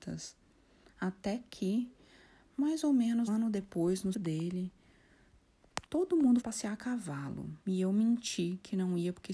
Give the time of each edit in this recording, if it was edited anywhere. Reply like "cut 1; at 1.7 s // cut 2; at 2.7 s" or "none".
cut 1; at 3.3 s // cut 2; at 4.1 s // cut 3; at 5.9 s // cut 4; at 6.4 s // cut 5; at 7.6 s